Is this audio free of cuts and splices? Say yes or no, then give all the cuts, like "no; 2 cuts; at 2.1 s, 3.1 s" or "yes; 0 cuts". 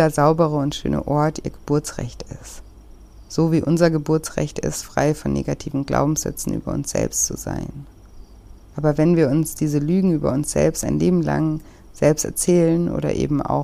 yes; 0 cuts